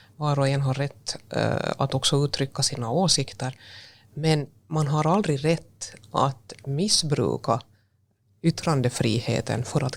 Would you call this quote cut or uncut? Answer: uncut